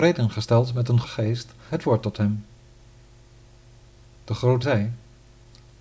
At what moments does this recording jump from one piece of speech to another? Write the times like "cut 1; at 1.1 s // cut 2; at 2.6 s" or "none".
cut 1; at 1.0 s // cut 2; at 1.7 s // cut 3; at 4.6 s